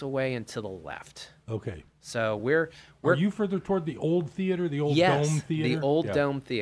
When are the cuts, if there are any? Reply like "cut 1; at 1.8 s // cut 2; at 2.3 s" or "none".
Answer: none